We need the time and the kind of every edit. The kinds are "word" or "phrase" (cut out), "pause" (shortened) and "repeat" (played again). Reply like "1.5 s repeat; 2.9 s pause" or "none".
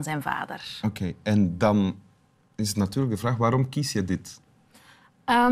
none